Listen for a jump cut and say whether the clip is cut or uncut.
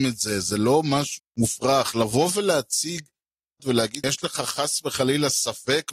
cut